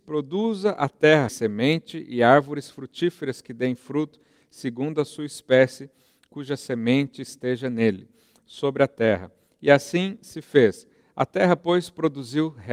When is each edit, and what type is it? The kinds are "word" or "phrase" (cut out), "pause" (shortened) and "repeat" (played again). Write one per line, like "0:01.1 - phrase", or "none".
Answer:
0:01.3 - phrase

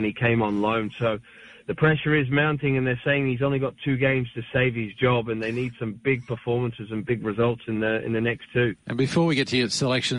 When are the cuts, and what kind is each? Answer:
0:08.8 - pause

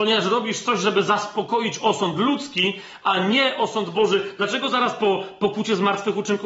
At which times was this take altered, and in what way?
none

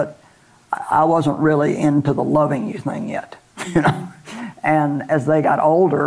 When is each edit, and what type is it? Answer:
none

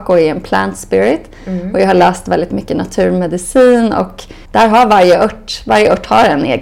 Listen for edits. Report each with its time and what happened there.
0:04.5 - pause

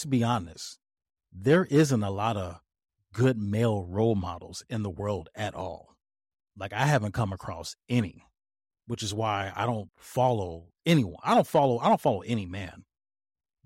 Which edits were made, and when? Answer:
0:09.9 - word

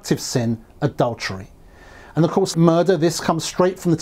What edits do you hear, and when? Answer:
0:02.5 - word

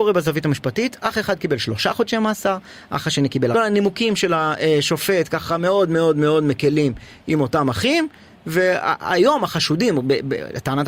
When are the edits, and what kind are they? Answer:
0:03.5 - phrase

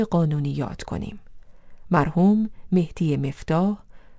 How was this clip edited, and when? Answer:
none

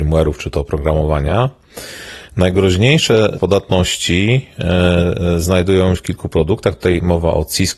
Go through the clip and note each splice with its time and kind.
0:03.4 - word
0:06.0 - word

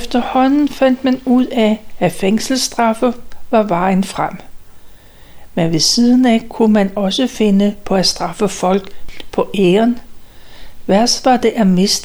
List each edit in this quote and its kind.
none

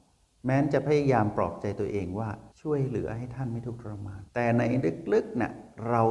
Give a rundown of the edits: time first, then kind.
0:02.5 - pause
0:04.3 - pause

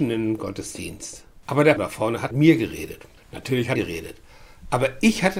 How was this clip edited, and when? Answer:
0:01.4 - pause
0:01.8 - word
0:02.3 - word
0:03.2 - pause
0:03.8 - phrase

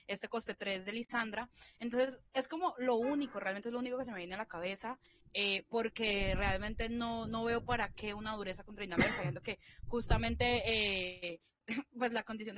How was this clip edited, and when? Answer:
none

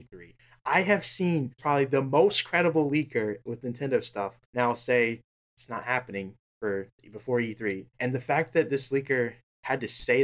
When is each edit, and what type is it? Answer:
0:01.6 - phrase
0:04.4 - pause
0:05.3 - pause
0:07.9 - pause

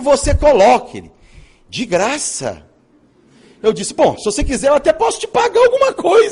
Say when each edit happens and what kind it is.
none

